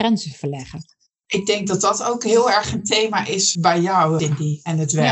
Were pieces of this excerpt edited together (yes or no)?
no